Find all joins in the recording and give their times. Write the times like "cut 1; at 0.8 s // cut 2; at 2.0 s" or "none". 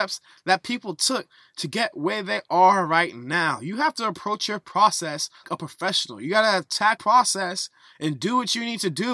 cut 1; at 5.4 s // cut 2; at 7.0 s